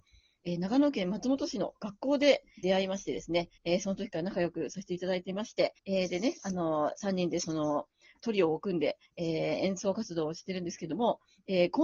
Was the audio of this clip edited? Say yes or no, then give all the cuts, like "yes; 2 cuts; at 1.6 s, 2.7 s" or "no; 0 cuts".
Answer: yes; 3 cuts; at 2.6 s, 3.6 s, 5.8 s